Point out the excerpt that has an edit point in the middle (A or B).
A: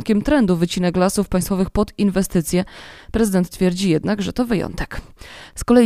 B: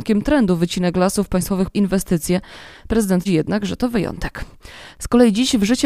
B